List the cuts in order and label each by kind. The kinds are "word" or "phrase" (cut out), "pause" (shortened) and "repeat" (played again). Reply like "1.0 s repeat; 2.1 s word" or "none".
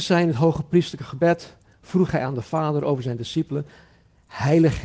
none